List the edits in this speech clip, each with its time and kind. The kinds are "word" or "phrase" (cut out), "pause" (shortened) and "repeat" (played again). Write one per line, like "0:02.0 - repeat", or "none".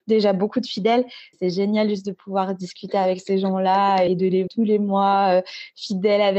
0:01.3 - word
0:04.1 - word
0:04.5 - word